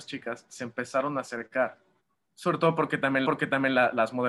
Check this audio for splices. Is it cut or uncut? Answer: cut